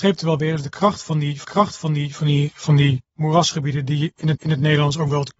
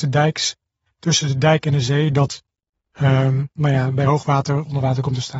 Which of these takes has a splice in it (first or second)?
first